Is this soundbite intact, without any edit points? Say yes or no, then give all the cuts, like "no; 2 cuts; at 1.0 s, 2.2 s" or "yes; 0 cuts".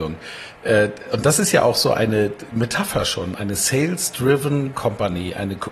yes; 0 cuts